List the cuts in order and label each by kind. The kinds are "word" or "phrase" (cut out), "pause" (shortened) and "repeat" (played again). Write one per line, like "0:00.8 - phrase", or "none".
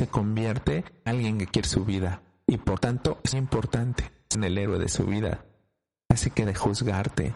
0:01.1 - word
0:01.6 - word
0:02.8 - word
0:03.3 - word
0:04.3 - word
0:06.5 - word